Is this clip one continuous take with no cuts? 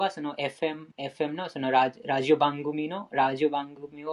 no; 1 cut; at 0.9 s

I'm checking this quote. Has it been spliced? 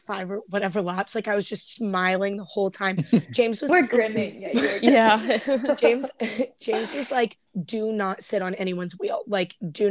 yes; 1 cut; at 3.7 s

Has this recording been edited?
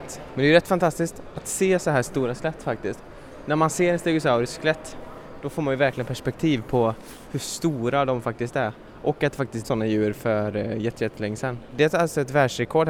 yes; 1 cut; at 9.6 s

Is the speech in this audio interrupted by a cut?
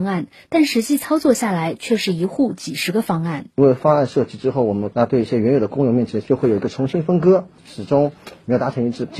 yes; 1 cut; at 3.5 s

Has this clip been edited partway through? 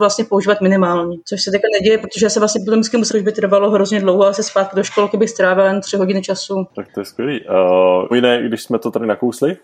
yes; 2 cuts; at 3.1 s, 8.1 s

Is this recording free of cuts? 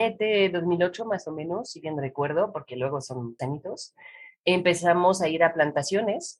no; 1 cut; at 3.4 s

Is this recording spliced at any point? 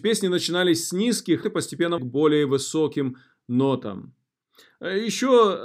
yes; 2 cuts; at 1.4 s, 2.0 s

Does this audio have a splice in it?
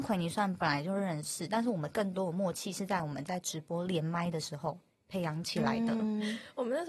no; 0 cuts

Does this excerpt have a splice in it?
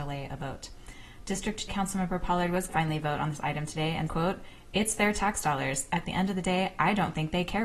yes; 3 cuts; at 1.7 s, 2.7 s, 4.1 s

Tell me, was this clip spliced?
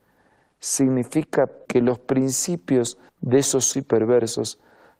yes; 3 cuts; at 1.7 s, 3.1 s, 3.7 s

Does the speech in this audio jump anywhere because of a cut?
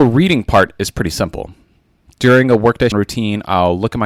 yes; 1 cut; at 2.9 s

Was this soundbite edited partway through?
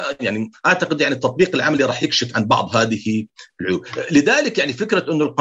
no; 0 cuts

